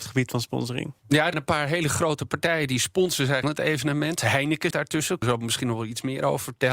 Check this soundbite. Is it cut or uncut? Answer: cut